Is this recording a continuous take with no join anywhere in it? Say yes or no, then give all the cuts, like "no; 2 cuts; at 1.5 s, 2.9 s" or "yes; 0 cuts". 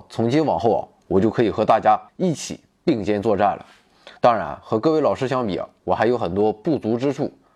no; 2 cuts; at 2.1 s, 4.2 s